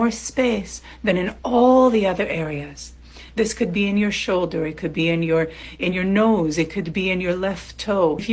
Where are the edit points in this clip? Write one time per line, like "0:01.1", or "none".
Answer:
none